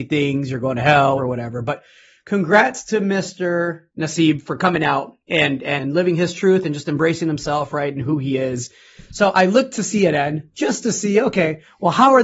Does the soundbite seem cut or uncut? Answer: cut